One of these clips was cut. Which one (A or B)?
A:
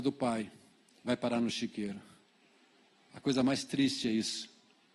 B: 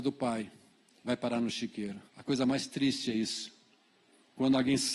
B